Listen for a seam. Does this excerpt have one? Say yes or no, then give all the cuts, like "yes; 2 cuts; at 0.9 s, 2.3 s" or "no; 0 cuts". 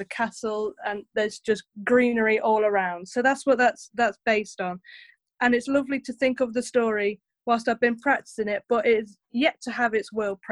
no; 0 cuts